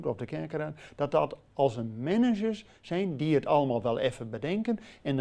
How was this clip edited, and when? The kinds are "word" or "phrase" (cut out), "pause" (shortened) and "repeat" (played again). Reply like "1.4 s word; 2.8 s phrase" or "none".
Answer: none